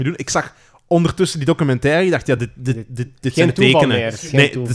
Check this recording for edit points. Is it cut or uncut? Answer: uncut